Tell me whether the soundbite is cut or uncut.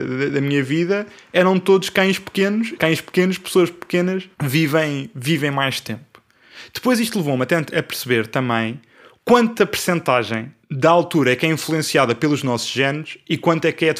cut